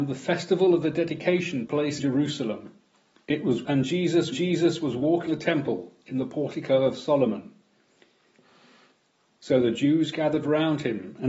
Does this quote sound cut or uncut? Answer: cut